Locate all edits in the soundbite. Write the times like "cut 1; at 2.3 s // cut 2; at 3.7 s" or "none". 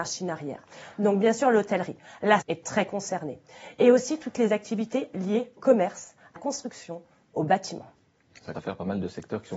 cut 1; at 2.4 s // cut 2; at 5.6 s // cut 3; at 6.4 s // cut 4; at 8.5 s

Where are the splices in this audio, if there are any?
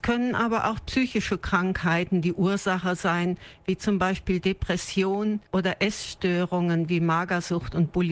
cut 1; at 5.5 s

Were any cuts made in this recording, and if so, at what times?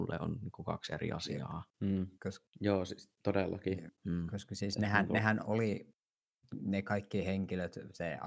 cut 1; at 1.7 s // cut 2; at 2.2 s // cut 3; at 4.0 s

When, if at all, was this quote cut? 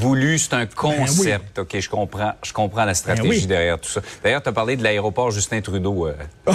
none

